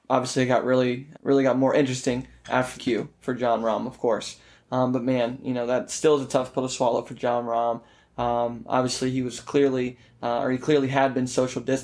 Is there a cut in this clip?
yes; 2 cuts; at 1.1 s, 2.8 s

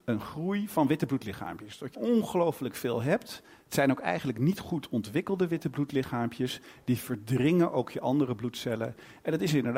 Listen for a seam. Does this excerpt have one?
yes; 2 cuts; at 1.9 s, 3.5 s

